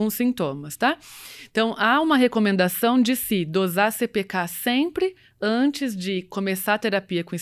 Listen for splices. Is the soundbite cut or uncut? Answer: uncut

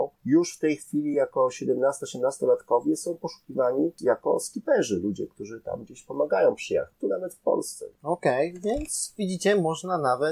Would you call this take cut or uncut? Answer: uncut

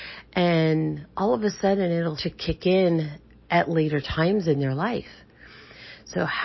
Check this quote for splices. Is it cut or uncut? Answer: cut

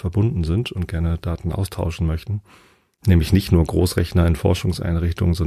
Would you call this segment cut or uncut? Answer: uncut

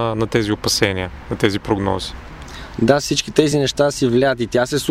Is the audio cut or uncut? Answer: uncut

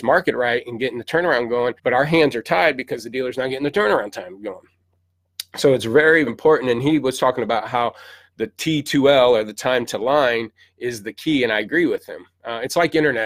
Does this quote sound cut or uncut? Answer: cut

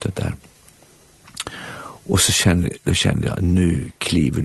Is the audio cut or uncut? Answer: uncut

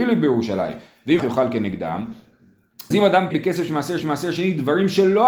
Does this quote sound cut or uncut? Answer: cut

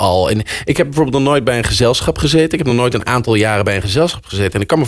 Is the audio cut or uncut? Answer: uncut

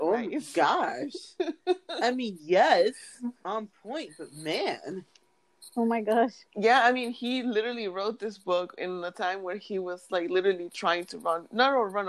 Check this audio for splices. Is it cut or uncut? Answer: cut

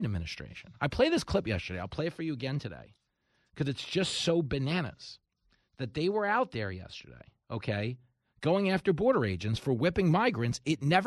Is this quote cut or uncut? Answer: uncut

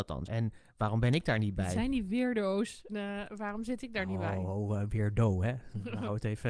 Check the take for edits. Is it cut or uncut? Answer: cut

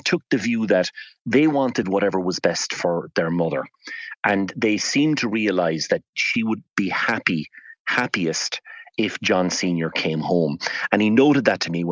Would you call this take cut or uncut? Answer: uncut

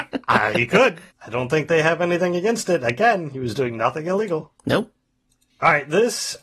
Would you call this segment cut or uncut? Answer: cut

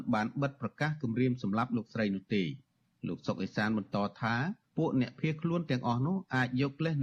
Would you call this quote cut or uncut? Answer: uncut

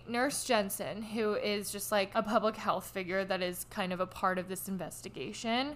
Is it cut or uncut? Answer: uncut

